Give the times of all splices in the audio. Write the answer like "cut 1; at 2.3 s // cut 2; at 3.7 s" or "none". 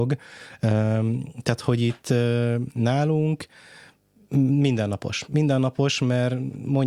none